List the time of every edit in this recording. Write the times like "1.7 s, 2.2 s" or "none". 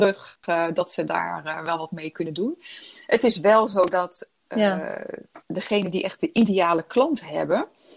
5.4 s